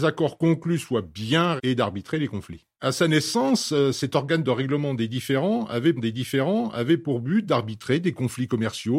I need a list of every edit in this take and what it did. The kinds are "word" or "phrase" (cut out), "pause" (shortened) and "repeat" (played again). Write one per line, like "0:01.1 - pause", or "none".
0:01.6 - word
0:06.0 - repeat